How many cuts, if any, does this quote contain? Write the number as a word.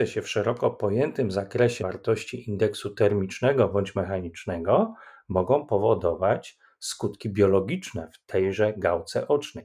one